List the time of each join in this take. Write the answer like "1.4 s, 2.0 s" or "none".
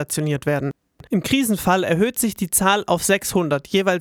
none